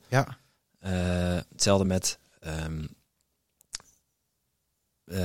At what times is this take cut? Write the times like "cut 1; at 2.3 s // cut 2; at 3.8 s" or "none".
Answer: none